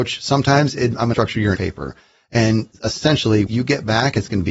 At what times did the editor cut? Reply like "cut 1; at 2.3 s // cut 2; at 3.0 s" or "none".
cut 1; at 1.1 s // cut 2; at 1.5 s // cut 3; at 3.5 s